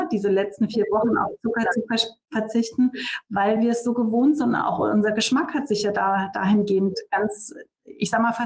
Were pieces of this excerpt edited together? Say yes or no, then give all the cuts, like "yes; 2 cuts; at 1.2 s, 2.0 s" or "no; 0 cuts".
no; 0 cuts